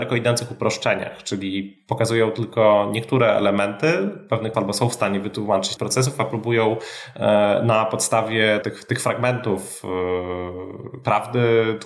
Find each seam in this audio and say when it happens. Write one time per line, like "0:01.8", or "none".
0:04.5
0:05.8
0:08.6